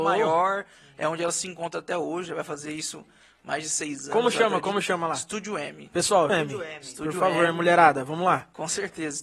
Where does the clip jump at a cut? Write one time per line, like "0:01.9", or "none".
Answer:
0:06.3